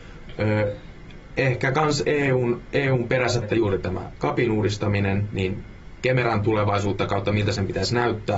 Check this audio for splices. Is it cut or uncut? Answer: cut